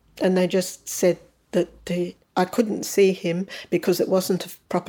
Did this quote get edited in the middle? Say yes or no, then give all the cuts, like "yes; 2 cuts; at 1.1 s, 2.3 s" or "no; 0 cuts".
no; 0 cuts